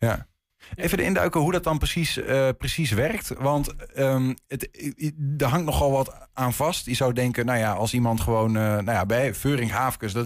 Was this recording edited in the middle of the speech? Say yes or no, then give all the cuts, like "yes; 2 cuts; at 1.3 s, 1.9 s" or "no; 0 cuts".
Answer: no; 0 cuts